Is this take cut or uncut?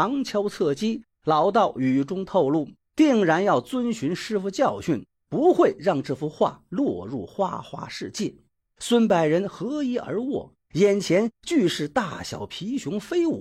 uncut